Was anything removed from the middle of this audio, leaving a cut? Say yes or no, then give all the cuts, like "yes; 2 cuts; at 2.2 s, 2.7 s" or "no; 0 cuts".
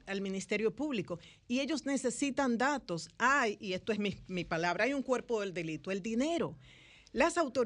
no; 0 cuts